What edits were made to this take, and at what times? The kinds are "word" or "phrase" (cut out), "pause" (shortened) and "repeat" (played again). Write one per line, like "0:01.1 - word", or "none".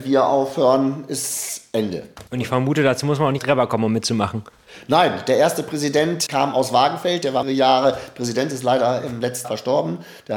0:02.3 - pause
0:03.4 - word
0:06.3 - word
0:07.4 - word
0:09.4 - word